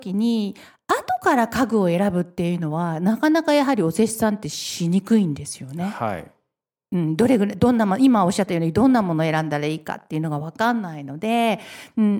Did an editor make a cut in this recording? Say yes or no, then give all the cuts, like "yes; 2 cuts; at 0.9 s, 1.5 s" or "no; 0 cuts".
no; 0 cuts